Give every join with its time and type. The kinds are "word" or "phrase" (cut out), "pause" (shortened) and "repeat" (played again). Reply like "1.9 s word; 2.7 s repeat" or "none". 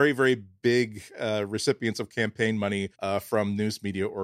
2.9 s pause